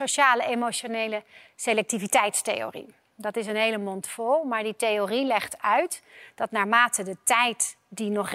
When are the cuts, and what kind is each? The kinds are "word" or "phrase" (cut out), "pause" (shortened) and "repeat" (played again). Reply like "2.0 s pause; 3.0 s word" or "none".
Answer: none